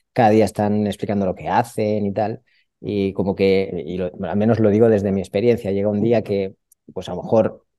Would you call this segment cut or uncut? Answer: uncut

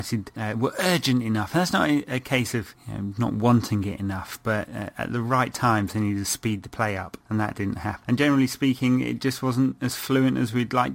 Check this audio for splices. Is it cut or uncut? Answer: uncut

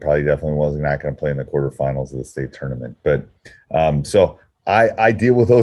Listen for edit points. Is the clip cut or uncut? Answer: uncut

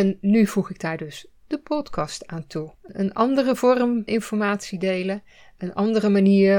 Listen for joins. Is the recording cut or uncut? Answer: cut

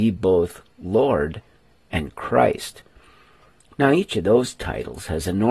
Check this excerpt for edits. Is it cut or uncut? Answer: uncut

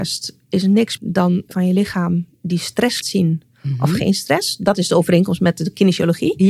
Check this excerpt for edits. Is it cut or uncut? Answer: cut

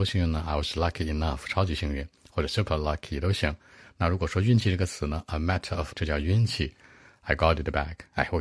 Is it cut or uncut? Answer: cut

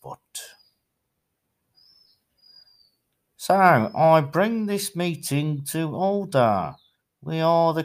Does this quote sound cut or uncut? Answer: uncut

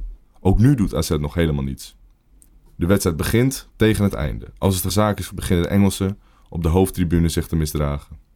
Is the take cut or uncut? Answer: cut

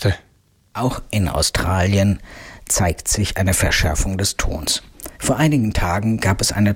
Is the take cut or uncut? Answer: cut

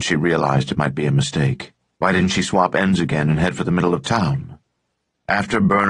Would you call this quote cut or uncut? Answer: cut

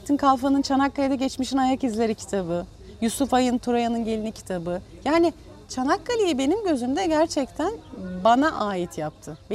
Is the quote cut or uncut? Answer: uncut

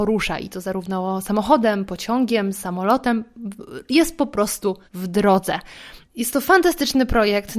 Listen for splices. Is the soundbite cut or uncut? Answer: cut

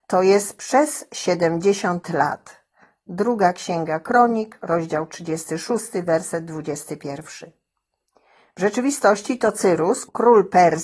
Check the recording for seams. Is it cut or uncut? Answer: uncut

